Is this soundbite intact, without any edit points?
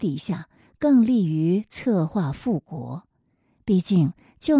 yes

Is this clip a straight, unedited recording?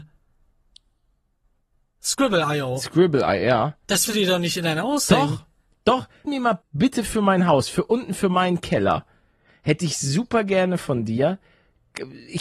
no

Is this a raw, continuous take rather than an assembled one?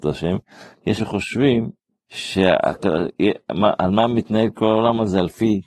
no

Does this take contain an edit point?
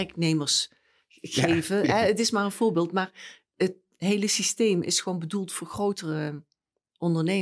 yes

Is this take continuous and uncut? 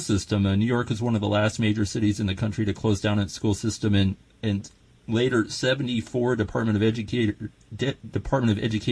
yes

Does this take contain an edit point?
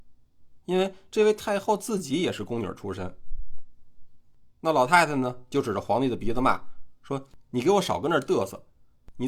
no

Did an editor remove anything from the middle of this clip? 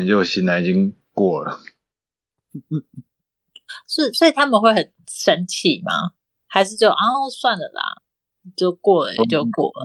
no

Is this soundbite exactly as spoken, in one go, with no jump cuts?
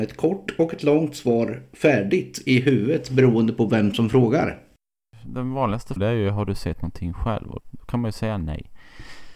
no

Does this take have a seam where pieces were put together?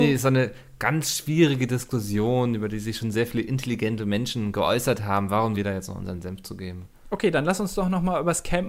yes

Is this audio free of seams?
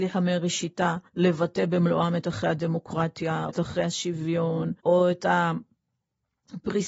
no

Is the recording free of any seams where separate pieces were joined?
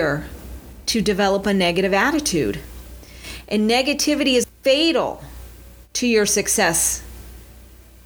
yes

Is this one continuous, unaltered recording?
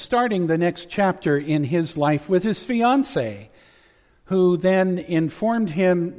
yes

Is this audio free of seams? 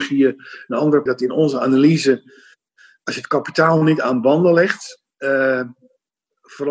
no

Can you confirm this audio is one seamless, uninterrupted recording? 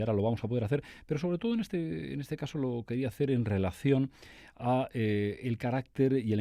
yes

